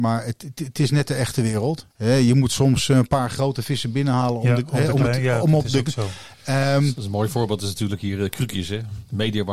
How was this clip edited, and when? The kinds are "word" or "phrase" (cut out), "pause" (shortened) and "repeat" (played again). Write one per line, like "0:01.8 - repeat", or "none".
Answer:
0:01.9 - pause